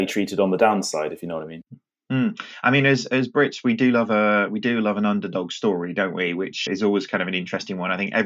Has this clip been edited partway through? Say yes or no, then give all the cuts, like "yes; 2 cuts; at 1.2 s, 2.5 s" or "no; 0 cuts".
yes; 1 cut; at 6.7 s